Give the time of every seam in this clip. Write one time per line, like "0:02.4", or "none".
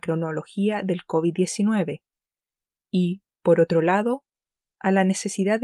none